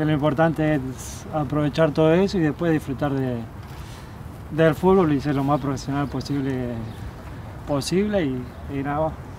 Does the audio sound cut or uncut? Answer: uncut